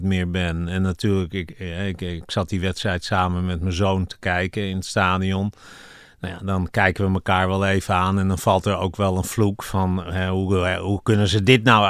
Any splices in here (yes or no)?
no